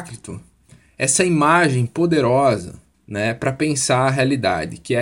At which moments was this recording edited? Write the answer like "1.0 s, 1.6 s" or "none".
2.9 s